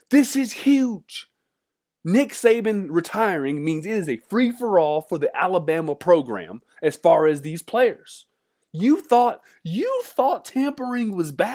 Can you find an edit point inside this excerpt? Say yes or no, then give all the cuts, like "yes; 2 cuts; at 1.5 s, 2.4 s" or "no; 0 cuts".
no; 0 cuts